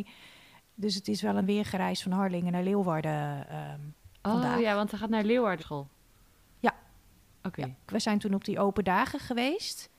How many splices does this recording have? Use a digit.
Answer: 4